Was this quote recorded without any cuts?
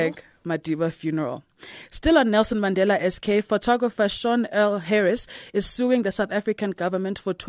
yes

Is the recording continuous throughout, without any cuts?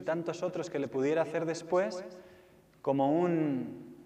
yes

